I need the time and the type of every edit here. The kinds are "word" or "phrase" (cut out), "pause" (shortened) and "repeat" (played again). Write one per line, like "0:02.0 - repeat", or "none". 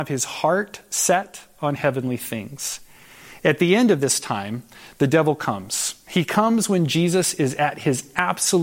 none